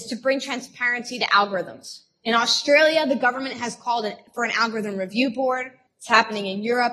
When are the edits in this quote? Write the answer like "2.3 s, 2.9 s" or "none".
none